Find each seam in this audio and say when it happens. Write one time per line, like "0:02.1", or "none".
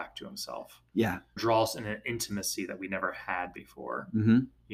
0:01.4